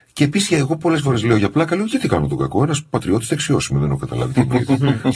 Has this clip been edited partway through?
no; 0 cuts

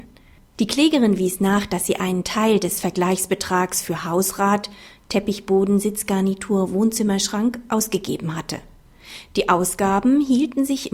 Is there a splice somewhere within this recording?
no; 0 cuts

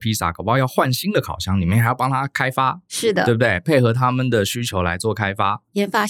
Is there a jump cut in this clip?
no; 0 cuts

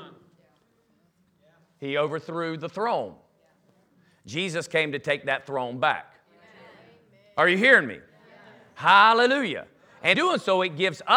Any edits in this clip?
yes; 1 cut; at 10.1 s

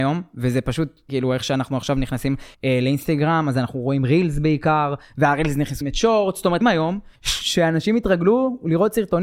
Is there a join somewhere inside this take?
yes; 5 cuts; at 1.1 s, 2.5 s, 5.8 s, 6.6 s, 7.2 s

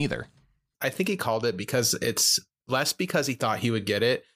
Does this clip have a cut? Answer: yes; 1 cut; at 2.6 s

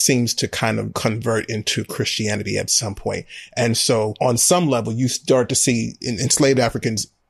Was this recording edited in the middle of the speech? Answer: no; 0 cuts

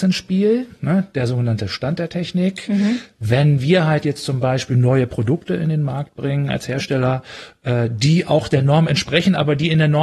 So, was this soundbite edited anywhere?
no; 0 cuts

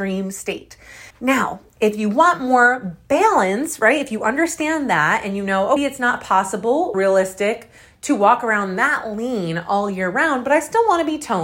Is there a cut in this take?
yes; 3 cuts; at 1.1 s, 5.8 s, 6.9 s

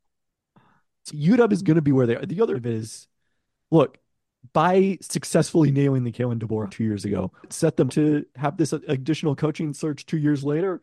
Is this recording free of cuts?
no; 5 cuts; at 1.1 s, 2.5 s, 6.7 s, 7.4 s, 7.9 s

